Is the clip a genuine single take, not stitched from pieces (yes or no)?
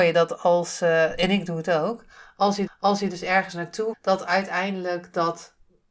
no